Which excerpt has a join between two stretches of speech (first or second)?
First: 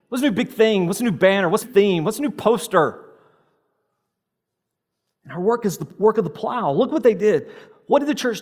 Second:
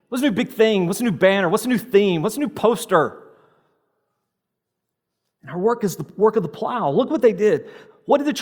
first